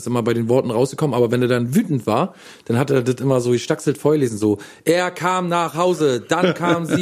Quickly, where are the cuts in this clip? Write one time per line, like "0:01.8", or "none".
none